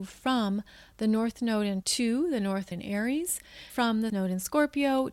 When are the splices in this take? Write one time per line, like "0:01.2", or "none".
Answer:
0:01.8
0:02.7
0:03.7
0:04.1